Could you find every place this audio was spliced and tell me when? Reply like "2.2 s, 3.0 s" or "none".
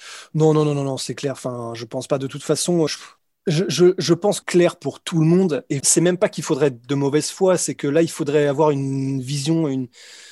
2.9 s, 3.2 s, 4.4 s, 5.8 s